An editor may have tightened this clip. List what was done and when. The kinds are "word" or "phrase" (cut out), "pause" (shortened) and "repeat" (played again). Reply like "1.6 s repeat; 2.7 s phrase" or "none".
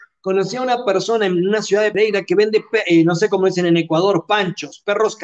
none